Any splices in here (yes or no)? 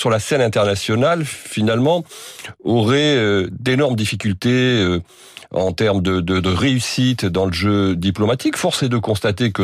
no